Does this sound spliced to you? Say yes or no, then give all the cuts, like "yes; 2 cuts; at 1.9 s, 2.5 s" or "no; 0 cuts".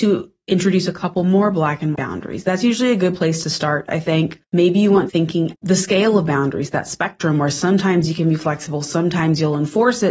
yes; 4 cuts; at 1.9 s, 4.4 s, 5.1 s, 5.5 s